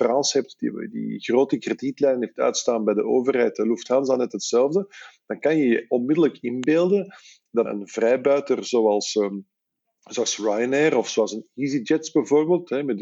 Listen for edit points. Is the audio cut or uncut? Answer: cut